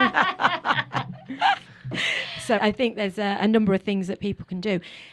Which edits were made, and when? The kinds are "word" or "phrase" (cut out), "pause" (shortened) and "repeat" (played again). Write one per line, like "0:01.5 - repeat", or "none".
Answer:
0:02.6 - word